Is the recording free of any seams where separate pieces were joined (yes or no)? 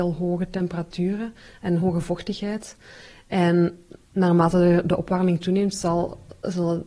yes